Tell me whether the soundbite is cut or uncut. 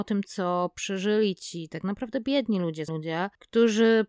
cut